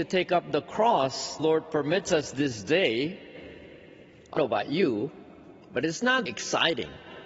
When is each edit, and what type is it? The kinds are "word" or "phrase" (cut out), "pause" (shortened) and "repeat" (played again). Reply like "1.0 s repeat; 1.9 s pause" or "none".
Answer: 1.4 s word; 4.4 s word; 6.3 s word